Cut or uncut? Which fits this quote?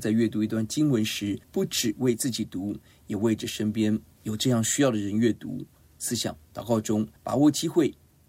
cut